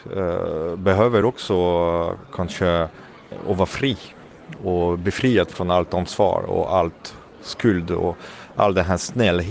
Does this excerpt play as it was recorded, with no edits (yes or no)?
yes